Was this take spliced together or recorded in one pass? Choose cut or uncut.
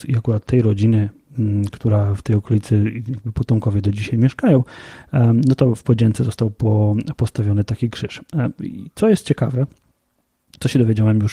uncut